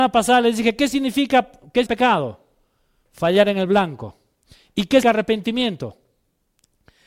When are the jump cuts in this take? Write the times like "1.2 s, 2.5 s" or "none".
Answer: 1.9 s, 5.0 s